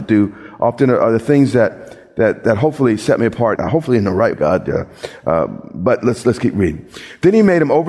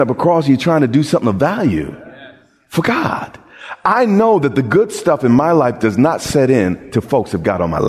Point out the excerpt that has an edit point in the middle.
first; 2 cuts; at 3.6 s, 4.3 s

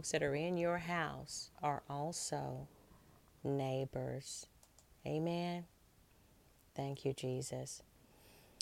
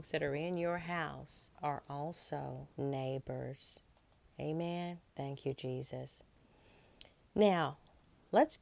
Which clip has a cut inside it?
second; 2 cuts; at 2.7 s, 5.1 s

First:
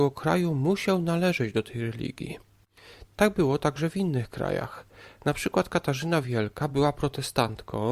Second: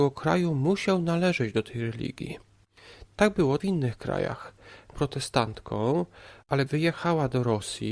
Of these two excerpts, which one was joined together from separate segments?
second; 3 cuts; at 3.6 s, 4.9 s, 6.7 s

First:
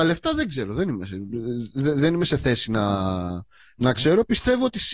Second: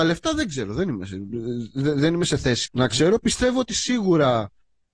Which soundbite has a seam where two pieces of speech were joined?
second; 1 cut; at 2.7 s

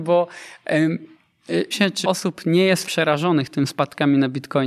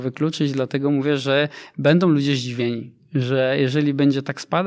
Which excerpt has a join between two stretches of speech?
first; 3 cuts; at 1.7 s, 2.0 s, 2.8 s

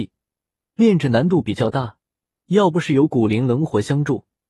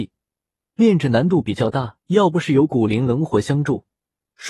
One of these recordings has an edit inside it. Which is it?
second; 1 cut; at 2.0 s

